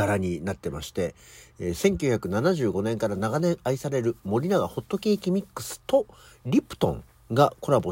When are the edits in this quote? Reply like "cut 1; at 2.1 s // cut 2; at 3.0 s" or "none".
none